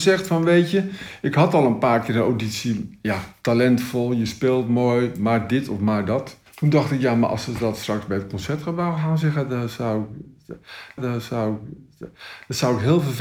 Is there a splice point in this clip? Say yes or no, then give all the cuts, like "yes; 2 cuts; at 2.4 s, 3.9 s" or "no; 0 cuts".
yes; 2 cuts; at 6.5 s, 11.0 s